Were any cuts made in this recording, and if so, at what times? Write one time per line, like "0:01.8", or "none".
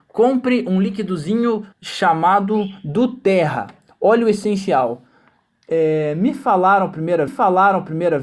0:01.7
0:07.3